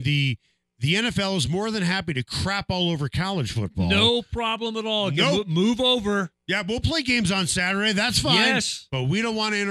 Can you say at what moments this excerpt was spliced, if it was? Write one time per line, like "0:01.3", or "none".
none